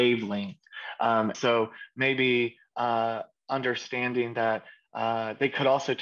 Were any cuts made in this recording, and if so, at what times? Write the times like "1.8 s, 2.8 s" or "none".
1.3 s

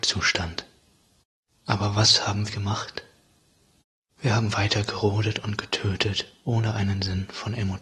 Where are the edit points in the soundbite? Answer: 2.5 s

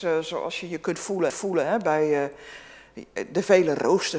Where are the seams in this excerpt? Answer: 1.3 s

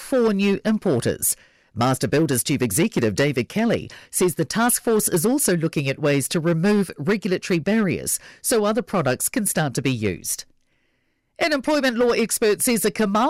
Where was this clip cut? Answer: none

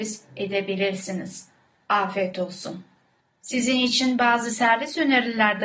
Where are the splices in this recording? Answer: none

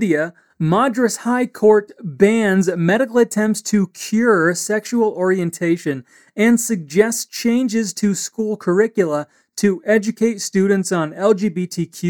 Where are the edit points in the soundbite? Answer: none

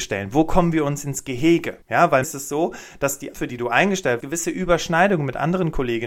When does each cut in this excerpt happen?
1.8 s, 2.2 s, 3.3 s, 4.2 s

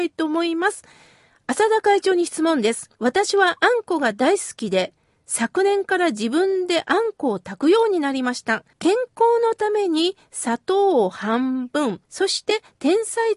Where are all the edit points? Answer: 2.9 s, 8.7 s, 12.0 s

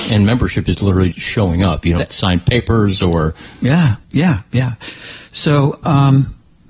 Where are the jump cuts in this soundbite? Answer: 1.1 s, 4.0 s

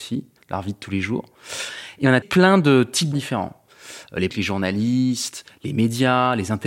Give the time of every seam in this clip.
2.2 s, 3.1 s, 4.3 s

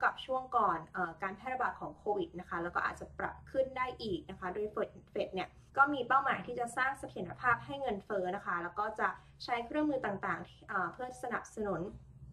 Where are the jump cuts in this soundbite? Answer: 5.7 s

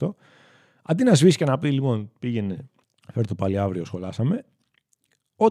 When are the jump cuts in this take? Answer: 2.8 s

